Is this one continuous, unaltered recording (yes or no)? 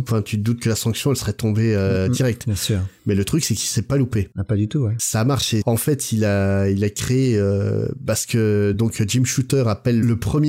yes